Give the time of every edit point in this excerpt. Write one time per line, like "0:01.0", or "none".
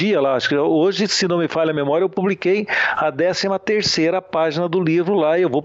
none